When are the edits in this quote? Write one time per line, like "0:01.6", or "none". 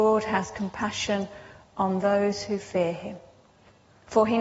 none